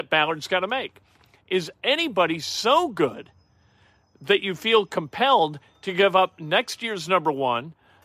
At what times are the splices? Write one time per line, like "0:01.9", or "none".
none